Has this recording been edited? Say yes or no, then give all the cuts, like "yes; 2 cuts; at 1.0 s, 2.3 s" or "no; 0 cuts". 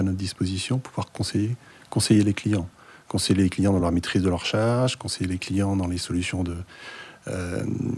no; 0 cuts